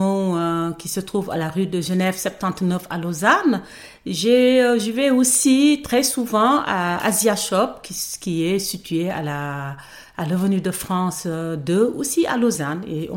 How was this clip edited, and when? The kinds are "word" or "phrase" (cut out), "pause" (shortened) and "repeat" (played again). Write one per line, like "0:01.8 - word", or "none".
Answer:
none